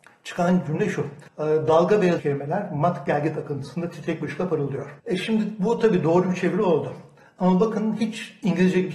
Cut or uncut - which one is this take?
cut